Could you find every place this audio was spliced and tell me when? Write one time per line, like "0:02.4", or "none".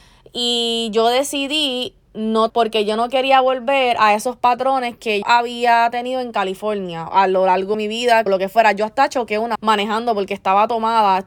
0:02.5
0:05.2
0:07.1
0:07.7
0:08.3
0:09.6